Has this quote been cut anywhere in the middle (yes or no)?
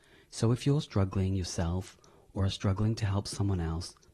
no